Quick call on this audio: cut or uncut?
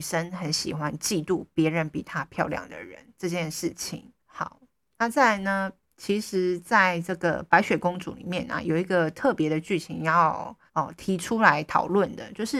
cut